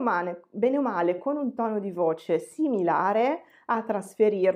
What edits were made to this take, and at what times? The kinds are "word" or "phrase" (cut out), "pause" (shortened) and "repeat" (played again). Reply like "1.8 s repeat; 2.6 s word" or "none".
none